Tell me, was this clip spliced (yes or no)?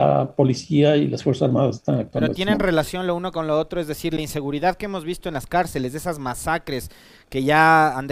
no